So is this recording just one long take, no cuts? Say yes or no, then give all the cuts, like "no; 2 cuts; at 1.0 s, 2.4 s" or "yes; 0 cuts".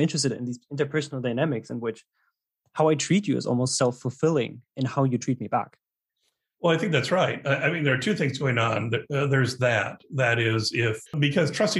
yes; 0 cuts